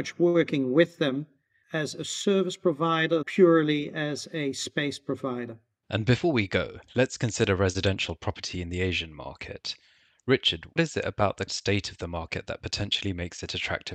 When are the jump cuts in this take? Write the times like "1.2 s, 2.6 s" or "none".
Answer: 3.2 s, 10.8 s, 11.5 s